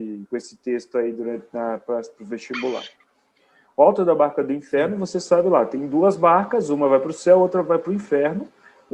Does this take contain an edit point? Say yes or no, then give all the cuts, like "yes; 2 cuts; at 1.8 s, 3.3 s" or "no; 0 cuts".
no; 0 cuts